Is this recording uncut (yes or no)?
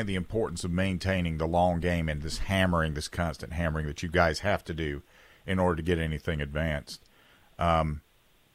yes